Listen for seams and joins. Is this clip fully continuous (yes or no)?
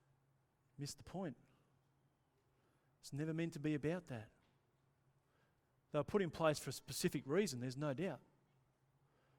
yes